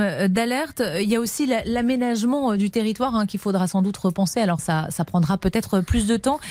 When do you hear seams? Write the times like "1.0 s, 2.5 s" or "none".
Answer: 4.6 s